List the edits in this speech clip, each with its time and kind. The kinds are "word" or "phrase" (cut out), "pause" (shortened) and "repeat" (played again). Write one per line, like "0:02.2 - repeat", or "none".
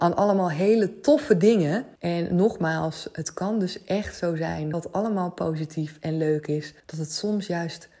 0:02.0 - pause
0:04.7 - word
0:06.8 - pause